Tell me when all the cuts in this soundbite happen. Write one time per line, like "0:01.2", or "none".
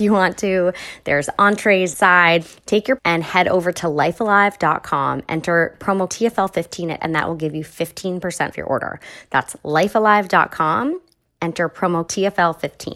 0:01.9
0:03.0
0:06.1
0:07.0
0:08.5
0:12.1